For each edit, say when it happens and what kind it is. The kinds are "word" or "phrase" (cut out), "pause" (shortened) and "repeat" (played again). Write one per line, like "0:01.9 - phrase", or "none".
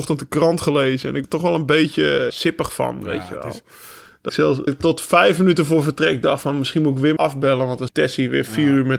0:01.2 - word
0:02.3 - word
0:04.3 - word
0:04.7 - word
0:07.2 - word
0:07.9 - word